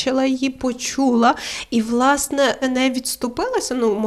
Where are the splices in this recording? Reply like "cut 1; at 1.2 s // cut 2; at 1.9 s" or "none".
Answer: cut 1; at 2.6 s